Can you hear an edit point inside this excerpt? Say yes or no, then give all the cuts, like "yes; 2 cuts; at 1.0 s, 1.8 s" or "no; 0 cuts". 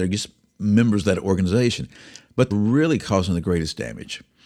yes; 1 cut; at 2.5 s